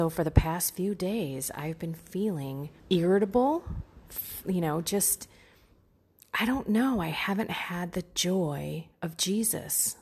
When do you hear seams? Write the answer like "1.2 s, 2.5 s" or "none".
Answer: 2.8 s